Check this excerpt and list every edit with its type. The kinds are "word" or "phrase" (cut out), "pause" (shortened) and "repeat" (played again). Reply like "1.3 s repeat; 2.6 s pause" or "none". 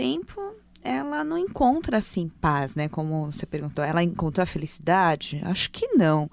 none